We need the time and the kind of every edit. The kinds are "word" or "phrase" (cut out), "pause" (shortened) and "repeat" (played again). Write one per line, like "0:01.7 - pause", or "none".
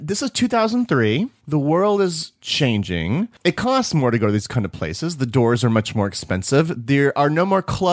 none